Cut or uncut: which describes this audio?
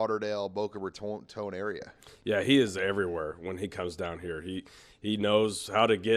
uncut